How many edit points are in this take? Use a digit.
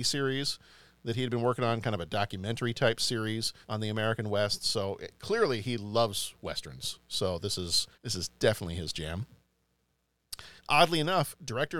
3